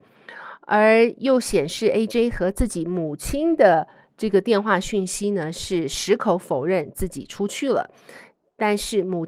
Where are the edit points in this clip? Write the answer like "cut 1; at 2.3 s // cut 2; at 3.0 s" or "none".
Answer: none